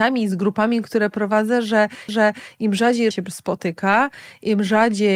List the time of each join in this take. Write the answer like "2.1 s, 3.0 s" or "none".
2.1 s, 3.1 s